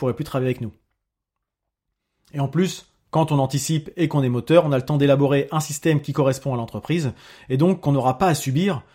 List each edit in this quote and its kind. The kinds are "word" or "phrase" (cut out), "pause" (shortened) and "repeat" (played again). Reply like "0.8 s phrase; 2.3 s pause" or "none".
none